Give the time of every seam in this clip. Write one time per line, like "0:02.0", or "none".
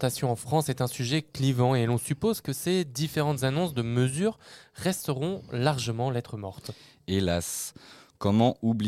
none